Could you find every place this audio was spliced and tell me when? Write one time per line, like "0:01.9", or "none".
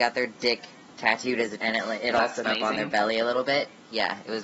0:01.6
0:02.4